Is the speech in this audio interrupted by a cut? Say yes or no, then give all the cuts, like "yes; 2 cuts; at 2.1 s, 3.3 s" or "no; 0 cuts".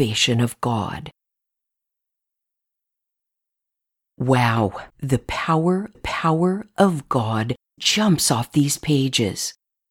yes; 3 cuts; at 4.9 s, 5.9 s, 7.8 s